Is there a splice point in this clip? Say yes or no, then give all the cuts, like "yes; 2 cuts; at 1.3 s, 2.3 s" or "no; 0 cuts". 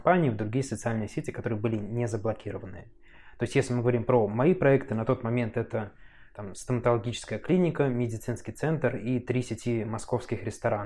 no; 0 cuts